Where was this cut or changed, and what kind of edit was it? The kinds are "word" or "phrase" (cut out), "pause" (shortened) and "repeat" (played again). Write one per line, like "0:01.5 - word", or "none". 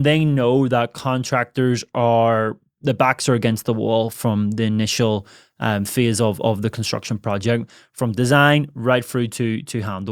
none

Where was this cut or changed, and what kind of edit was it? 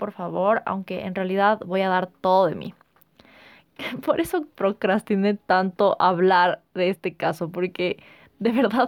none

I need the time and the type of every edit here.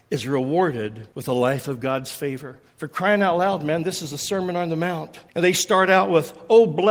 0:01.1 - pause
0:02.7 - pause
0:05.3 - pause

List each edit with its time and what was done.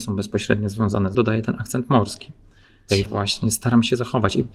0:01.1 - word
0:03.1 - word

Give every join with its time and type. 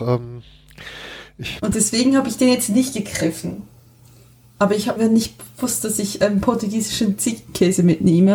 0:05.0 - word

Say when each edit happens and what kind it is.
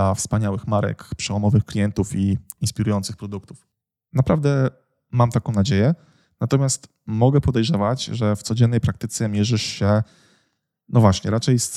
none

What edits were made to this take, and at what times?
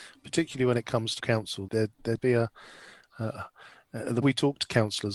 0:01.2 - word
0:01.7 - word
0:02.2 - phrase
0:04.2 - word

